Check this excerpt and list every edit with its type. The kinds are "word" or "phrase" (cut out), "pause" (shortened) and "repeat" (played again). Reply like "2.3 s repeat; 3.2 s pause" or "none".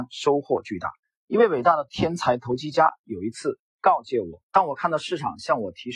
1.0 s pause; 4.4 s pause